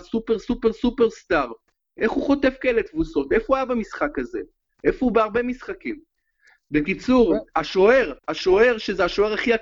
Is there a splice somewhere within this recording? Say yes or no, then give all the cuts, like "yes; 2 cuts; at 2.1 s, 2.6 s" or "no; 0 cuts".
yes; 1 cut; at 8.2 s